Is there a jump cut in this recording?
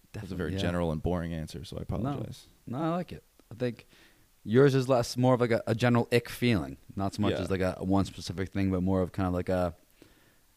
no; 0 cuts

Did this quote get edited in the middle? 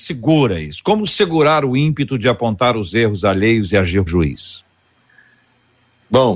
yes; 1 cut; at 4.1 s

